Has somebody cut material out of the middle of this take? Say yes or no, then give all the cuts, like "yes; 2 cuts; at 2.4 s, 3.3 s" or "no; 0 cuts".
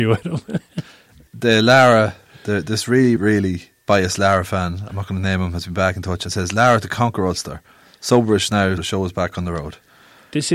yes; 3 cuts; at 1.3 s, 3.2 s, 8.8 s